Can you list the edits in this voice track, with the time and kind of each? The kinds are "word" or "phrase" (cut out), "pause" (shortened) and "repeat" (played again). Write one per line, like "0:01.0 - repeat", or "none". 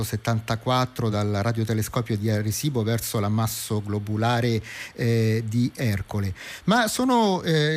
none